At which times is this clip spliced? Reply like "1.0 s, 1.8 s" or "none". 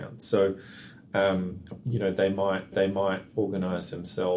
1.8 s, 2.7 s